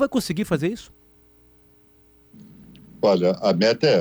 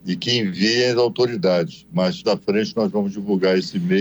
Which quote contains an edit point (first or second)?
second